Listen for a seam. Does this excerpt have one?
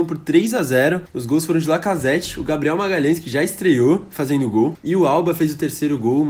no; 0 cuts

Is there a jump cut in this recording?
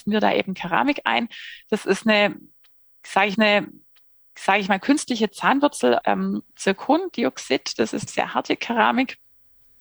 yes; 4 cuts; at 3.3 s, 6.0 s, 6.5 s, 8.1 s

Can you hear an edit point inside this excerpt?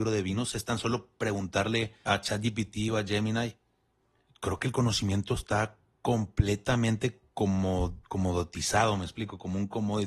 yes; 2 cuts; at 2.1 s, 8.0 s

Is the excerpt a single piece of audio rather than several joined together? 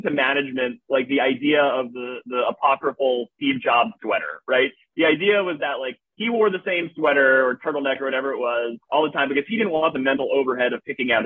no; 1 cut; at 8.8 s

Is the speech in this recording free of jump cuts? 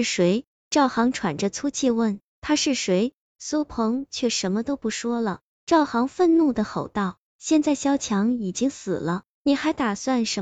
yes; 0 cuts

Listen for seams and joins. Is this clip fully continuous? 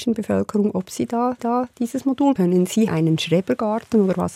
no; 3 cuts; at 1.4 s, 2.4 s, 2.9 s

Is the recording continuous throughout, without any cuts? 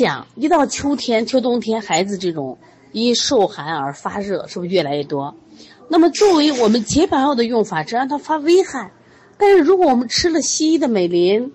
yes; 0 cuts

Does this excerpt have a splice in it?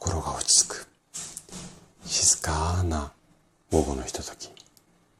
no; 0 cuts

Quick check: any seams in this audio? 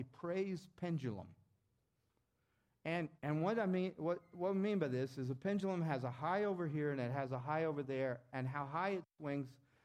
yes; 1 cut; at 3.2 s

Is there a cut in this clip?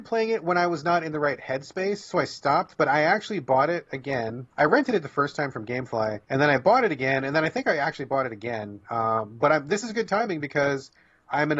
yes; 2 cuts; at 4.5 s, 6.2 s

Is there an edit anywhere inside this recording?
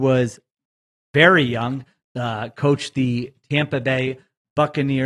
no; 0 cuts

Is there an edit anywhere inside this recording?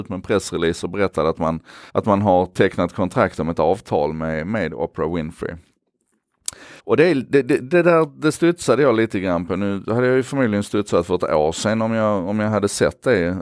yes; 2 cuts; at 1.9 s, 6.8 s

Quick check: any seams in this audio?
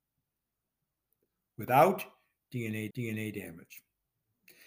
yes; 1 cut; at 2.9 s

